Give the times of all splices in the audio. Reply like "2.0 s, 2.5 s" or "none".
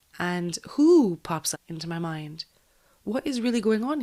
1.5 s